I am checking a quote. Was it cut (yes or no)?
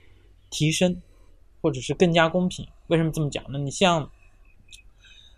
yes